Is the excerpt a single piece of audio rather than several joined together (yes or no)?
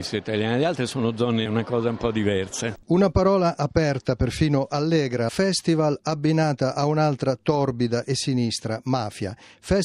no